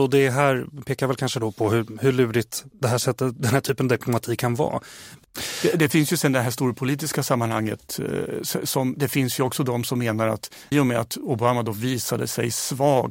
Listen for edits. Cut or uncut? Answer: cut